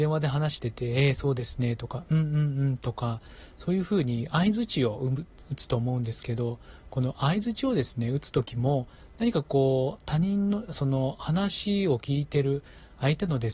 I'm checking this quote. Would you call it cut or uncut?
uncut